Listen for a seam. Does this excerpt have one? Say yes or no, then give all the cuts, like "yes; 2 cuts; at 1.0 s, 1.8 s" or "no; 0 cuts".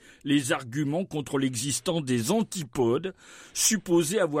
no; 0 cuts